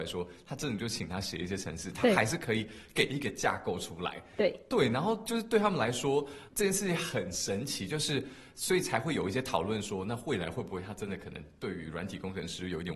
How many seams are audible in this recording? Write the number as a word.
one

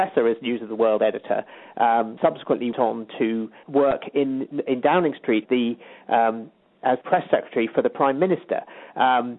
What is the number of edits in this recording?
six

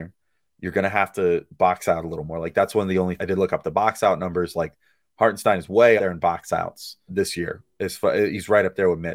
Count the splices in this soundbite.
three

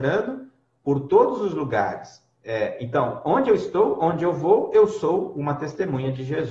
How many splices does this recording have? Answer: zero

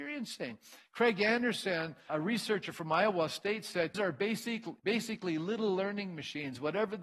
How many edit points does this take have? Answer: three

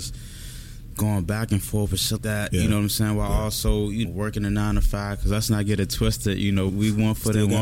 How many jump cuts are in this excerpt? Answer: three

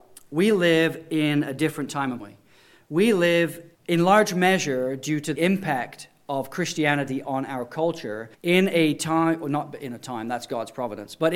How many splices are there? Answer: four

